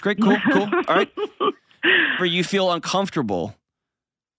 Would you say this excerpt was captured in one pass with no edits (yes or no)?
no